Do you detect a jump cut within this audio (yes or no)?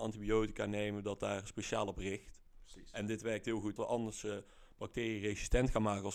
yes